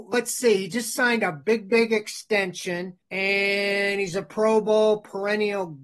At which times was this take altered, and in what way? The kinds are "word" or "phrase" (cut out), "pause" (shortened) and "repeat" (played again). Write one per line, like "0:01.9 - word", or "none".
0:03.0 - pause